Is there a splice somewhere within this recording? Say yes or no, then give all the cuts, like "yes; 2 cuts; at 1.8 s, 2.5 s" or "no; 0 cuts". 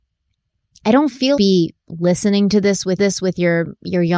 yes; 2 cuts; at 1.4 s, 3.0 s